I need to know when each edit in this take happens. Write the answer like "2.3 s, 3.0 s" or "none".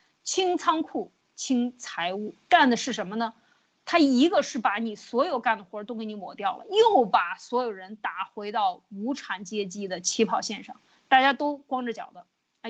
none

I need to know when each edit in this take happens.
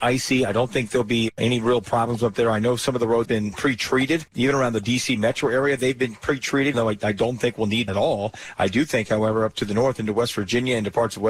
3.2 s, 6.7 s, 7.9 s

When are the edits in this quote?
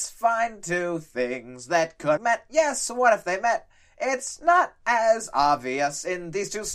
2.2 s

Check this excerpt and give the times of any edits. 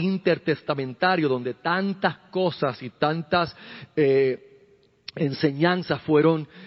none

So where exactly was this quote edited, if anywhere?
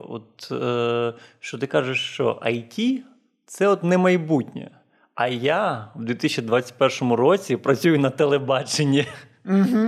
none

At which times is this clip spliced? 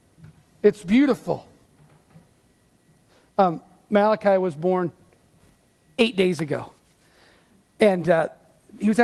none

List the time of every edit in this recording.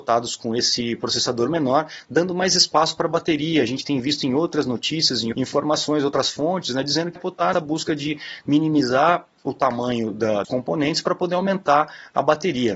5.3 s, 7.2 s, 7.5 s, 10.4 s

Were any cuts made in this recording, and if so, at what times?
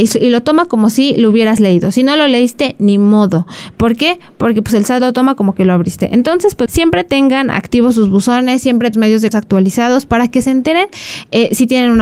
6.7 s, 8.9 s, 9.3 s

